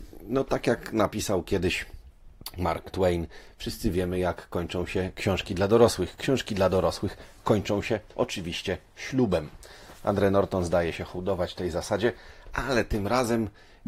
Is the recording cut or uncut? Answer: uncut